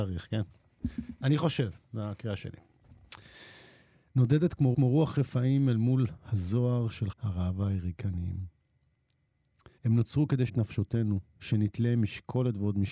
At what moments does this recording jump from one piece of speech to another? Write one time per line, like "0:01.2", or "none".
0:04.7
0:07.1
0:09.8
0:10.5